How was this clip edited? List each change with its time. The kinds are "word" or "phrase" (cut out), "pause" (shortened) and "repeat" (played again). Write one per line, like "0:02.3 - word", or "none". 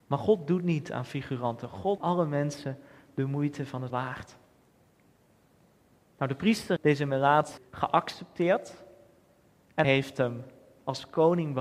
0:02.0 - word
0:03.9 - word
0:06.8 - word
0:07.6 - word
0:09.8 - word